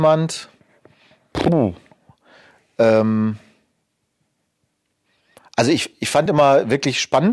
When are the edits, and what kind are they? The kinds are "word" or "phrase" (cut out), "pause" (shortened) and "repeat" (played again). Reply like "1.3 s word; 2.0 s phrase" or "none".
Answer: none